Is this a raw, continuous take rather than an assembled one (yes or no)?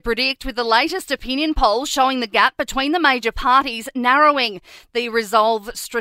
yes